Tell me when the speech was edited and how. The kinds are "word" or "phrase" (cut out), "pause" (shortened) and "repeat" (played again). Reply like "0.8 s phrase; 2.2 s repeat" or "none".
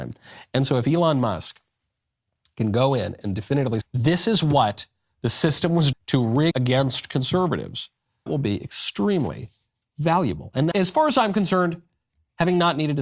3.8 s word; 5.9 s word; 6.5 s word; 8.3 s word; 10.7 s word